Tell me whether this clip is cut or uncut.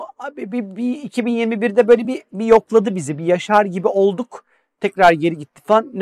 uncut